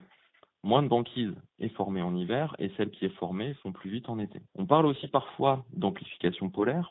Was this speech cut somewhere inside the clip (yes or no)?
yes